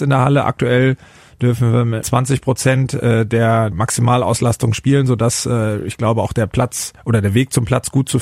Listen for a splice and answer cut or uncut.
cut